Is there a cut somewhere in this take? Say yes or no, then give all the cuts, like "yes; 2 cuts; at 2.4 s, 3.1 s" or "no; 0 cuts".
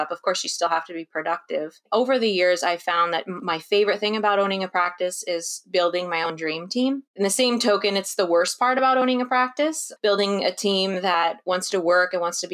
no; 0 cuts